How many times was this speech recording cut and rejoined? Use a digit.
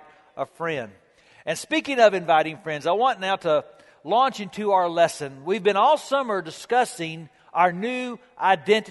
0